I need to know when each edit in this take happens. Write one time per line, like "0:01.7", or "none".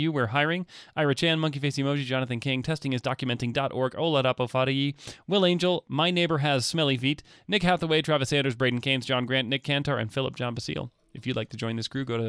none